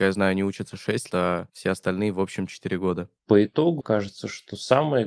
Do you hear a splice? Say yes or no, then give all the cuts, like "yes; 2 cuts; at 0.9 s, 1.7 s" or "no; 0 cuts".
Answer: yes; 3 cuts; at 1.1 s, 3.2 s, 3.8 s